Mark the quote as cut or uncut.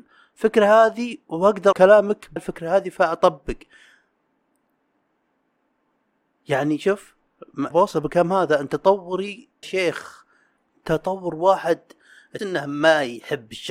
cut